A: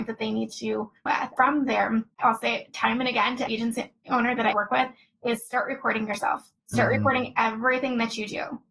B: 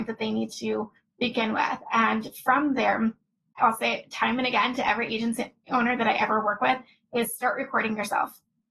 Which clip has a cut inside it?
A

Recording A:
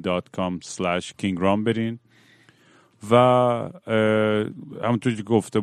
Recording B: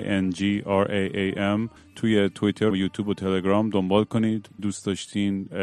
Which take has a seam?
B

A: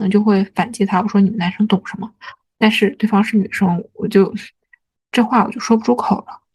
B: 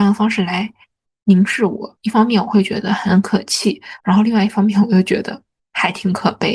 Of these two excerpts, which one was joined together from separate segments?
B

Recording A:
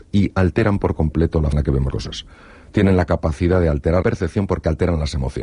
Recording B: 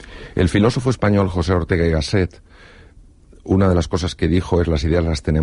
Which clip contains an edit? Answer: A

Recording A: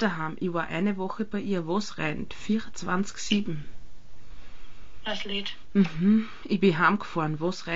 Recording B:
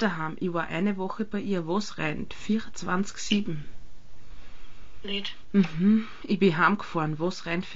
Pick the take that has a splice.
B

